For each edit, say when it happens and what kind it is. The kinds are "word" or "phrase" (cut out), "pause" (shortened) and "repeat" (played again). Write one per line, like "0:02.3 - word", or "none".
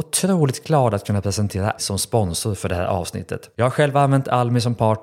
0:01.8 - word